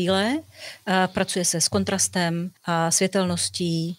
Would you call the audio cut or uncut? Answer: cut